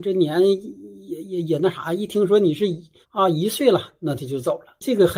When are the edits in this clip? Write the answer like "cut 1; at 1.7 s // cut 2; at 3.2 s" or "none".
cut 1; at 3.0 s